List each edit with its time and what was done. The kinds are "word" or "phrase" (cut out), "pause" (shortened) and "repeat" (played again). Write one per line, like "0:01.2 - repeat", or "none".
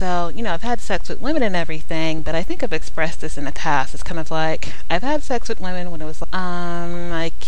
0:06.2 - word